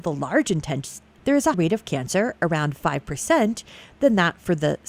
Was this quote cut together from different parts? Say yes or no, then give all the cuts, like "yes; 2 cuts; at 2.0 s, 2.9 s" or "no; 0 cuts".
yes; 2 cuts; at 1.2 s, 1.5 s